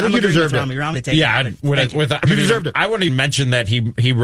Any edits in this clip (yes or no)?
yes